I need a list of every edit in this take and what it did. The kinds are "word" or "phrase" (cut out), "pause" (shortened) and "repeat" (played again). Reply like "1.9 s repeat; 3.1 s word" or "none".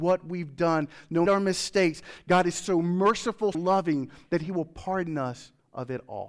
1.3 s phrase; 3.5 s word